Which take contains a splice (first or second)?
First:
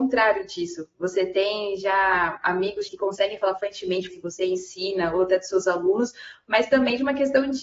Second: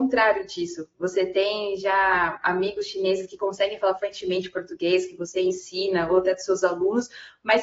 first